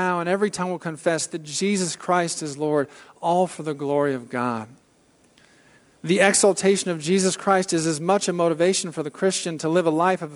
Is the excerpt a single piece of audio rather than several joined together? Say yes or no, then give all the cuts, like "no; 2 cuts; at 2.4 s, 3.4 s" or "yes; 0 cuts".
yes; 0 cuts